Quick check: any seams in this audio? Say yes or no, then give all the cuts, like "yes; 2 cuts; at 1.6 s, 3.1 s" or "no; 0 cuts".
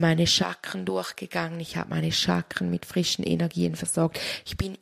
no; 0 cuts